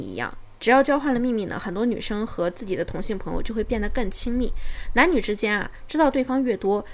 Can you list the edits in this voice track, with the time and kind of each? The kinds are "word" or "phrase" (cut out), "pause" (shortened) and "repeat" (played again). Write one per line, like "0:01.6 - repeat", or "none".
none